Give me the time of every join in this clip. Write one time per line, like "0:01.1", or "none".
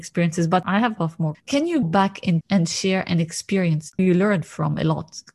0:01.0
0:01.3
0:01.8
0:02.4
0:04.0